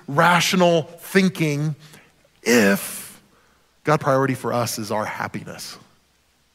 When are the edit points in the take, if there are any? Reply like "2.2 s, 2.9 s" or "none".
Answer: 4.0 s

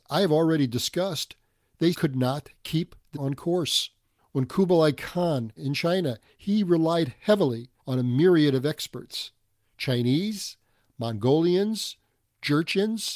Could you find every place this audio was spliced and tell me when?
1.9 s, 3.1 s, 4.0 s, 5.6 s, 7.8 s

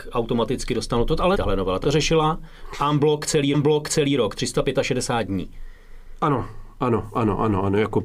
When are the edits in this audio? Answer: 1.3 s, 1.8 s, 3.5 s

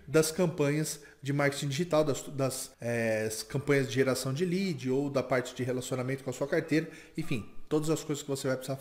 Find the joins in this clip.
2.7 s

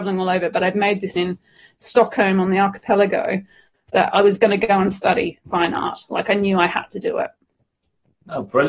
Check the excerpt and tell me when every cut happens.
1.2 s

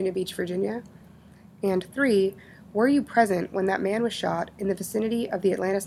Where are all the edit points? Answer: none

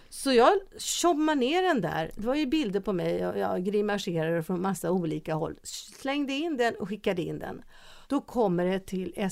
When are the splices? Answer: 8.0 s

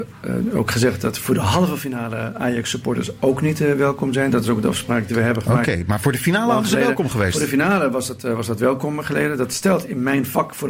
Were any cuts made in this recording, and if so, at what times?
none

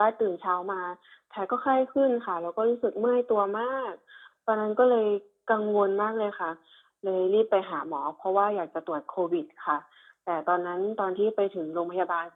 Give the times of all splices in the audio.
none

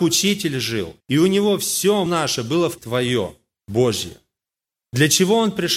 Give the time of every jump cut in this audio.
1.0 s, 2.1 s, 2.8 s

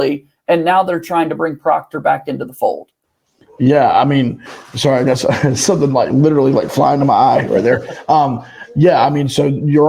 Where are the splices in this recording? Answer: none

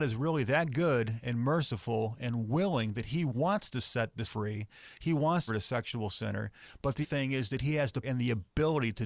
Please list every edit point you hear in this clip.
4.2 s, 5.5 s, 7.0 s, 8.0 s

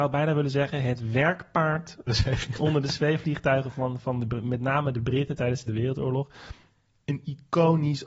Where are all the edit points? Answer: 2.1 s, 5.7 s

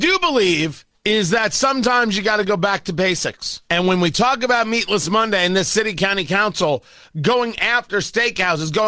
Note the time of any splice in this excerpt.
0.9 s, 3.7 s

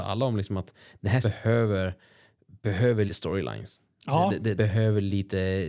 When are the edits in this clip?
1.2 s, 3.1 s, 4.6 s

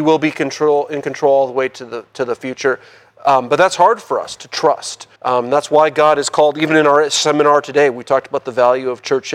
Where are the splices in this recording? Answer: 5.2 s

